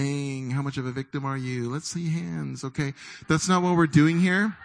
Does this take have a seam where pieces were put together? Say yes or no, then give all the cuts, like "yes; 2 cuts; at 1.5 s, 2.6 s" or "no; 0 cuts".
no; 0 cuts